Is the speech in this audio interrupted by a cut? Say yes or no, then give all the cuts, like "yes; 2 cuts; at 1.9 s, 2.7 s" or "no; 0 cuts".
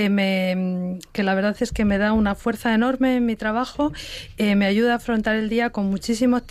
no; 0 cuts